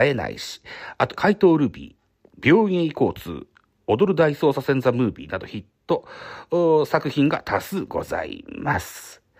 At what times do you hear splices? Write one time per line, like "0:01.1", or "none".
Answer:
0:01.2